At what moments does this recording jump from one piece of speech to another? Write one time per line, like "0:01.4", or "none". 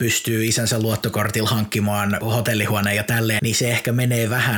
0:03.4